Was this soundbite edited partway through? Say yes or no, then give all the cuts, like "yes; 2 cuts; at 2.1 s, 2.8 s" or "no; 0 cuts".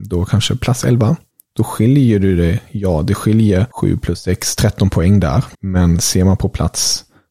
yes; 3 cuts; at 1.3 s, 3.7 s, 5.5 s